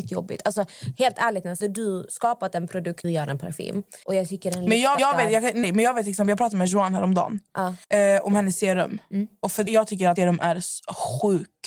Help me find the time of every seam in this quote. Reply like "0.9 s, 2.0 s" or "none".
1.6 s, 3.0 s, 4.0 s, 5.0 s, 5.6 s, 7.8 s, 9.7 s, 10.2 s